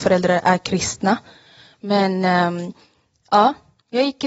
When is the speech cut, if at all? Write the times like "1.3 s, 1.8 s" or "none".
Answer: none